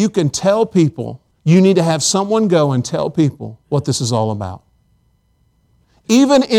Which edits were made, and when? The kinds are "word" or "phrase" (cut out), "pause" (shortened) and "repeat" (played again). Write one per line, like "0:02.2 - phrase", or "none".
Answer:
0:01.3 - pause
0:03.6 - pause

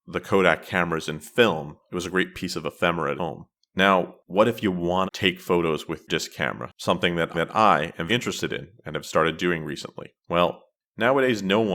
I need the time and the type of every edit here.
0:01.8 - pause
0:03.2 - phrase
0:03.6 - pause
0:05.1 - word
0:06.1 - word
0:07.3 - repeat
0:08.1 - word
0:10.2 - pause

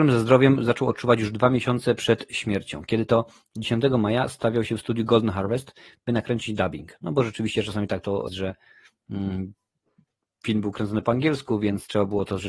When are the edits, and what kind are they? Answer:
0:08.3 - word

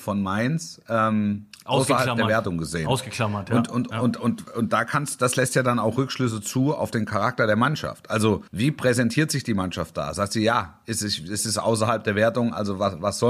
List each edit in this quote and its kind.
0:08.5 - pause

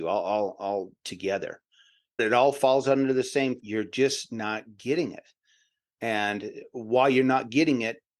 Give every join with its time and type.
0:02.2 - word
0:03.6 - word

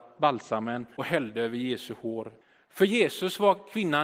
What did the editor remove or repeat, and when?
0:01.0 - word
0:02.4 - pause

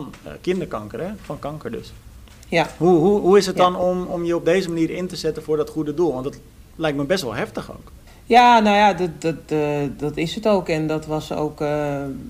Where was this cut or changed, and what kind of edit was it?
0:06.7 - pause
0:08.1 - pause

